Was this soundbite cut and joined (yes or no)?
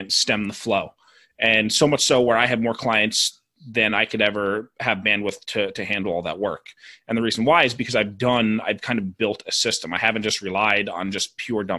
no